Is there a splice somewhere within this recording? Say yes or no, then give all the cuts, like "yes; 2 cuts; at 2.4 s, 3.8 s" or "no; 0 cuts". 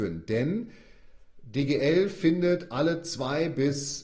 no; 0 cuts